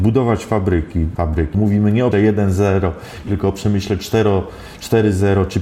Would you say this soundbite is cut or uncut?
cut